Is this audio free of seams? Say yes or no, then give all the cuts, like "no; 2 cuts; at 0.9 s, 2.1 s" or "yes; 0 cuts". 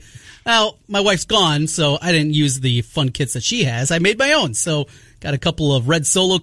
yes; 0 cuts